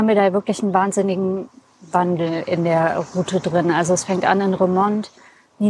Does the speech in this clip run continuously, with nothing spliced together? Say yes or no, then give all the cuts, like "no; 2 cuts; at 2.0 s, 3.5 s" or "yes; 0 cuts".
yes; 0 cuts